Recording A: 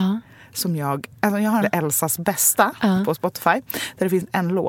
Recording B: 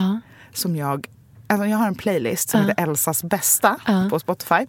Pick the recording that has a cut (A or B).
A